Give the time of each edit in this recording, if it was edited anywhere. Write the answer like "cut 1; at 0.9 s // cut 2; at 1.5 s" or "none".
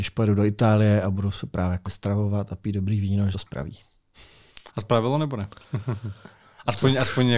cut 1; at 1.8 s // cut 2; at 3.3 s // cut 3; at 4.7 s